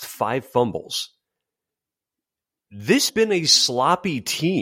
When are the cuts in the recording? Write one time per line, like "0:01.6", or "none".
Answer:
0:03.1